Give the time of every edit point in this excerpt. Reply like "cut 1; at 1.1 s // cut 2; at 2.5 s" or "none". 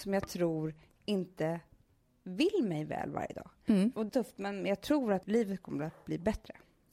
cut 1; at 4.1 s